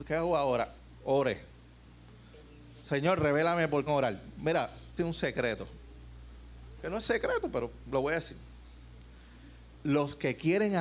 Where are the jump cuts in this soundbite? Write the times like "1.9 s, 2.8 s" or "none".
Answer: 3.9 s, 5.0 s, 9.7 s